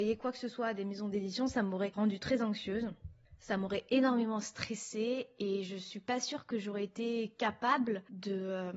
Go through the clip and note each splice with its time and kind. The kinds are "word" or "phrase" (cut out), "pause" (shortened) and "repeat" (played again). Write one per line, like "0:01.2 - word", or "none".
none